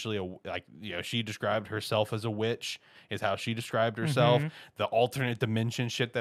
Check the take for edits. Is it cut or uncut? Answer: uncut